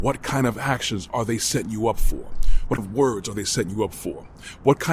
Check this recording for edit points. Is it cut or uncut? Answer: cut